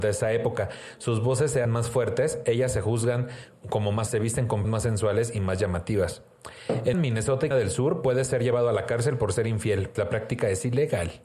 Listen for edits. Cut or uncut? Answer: cut